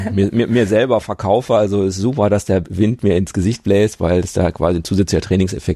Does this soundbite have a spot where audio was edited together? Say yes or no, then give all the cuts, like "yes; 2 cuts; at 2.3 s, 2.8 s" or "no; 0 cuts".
no; 0 cuts